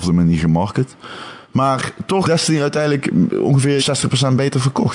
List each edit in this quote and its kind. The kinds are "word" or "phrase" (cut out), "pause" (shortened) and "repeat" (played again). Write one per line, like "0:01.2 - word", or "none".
0:01.4 - pause
0:02.2 - word
0:03.8 - phrase